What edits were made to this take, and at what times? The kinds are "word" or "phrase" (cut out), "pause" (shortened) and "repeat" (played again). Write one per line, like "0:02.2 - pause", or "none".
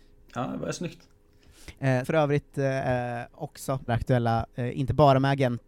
0:02.0 - word
0:03.9 - word